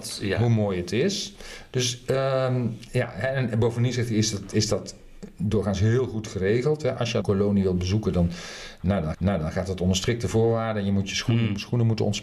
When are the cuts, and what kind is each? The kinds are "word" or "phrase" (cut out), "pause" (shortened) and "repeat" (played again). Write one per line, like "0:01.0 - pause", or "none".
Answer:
0:07.2 - phrase
0:09.1 - repeat